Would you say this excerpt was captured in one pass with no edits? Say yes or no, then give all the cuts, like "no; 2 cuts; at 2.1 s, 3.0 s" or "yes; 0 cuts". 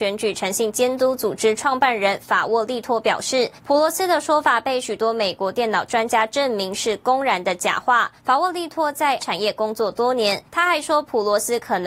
no; 4 cuts; at 3.6 s, 8.2 s, 9.2 s, 10.5 s